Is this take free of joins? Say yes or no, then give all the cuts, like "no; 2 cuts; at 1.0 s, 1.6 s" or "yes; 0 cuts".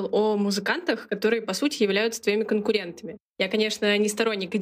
yes; 0 cuts